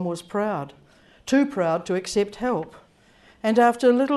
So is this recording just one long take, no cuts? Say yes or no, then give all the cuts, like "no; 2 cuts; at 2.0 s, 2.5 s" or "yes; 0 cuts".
yes; 0 cuts